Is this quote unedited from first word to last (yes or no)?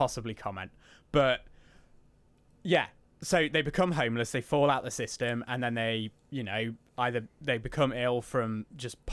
yes